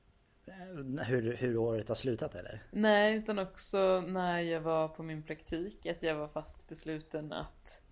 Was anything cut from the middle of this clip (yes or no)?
no